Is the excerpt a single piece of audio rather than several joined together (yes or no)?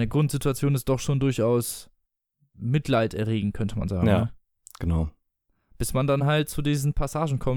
yes